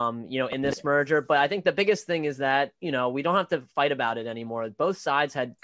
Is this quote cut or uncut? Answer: uncut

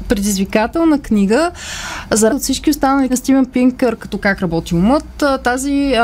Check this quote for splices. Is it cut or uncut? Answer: cut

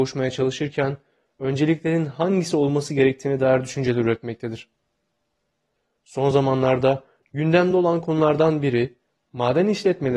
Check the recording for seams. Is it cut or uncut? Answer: uncut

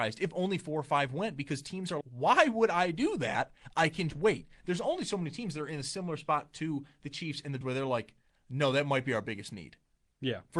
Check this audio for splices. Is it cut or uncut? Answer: cut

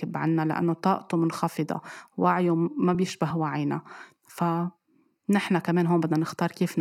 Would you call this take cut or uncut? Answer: uncut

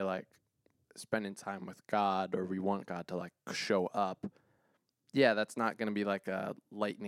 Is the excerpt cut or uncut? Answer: uncut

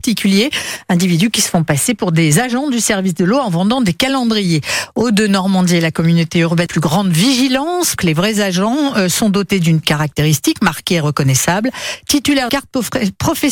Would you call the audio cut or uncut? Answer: cut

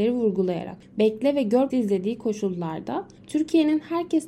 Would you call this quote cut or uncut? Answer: cut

